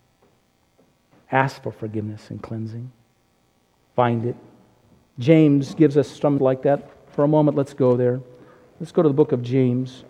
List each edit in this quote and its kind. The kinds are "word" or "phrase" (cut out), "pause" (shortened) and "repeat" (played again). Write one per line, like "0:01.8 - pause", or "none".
0:06.4 - word